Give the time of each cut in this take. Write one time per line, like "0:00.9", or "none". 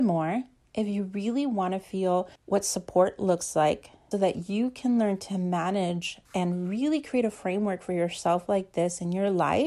0:02.4
0:04.1
0:06.3